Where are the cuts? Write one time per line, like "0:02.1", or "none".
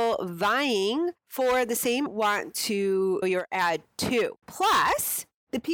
0:01.2
0:02.1
0:03.2
0:04.4